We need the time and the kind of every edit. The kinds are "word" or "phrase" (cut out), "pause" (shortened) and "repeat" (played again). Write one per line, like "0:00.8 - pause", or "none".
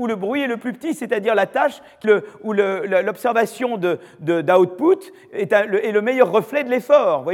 0:02.0 - phrase